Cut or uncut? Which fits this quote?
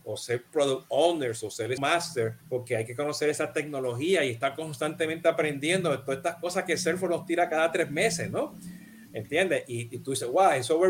cut